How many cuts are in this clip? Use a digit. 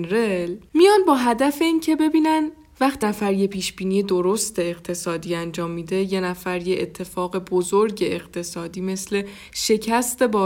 1